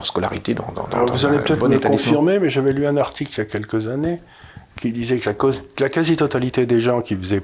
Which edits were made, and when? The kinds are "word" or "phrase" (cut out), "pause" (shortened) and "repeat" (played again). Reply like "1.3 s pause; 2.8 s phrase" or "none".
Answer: none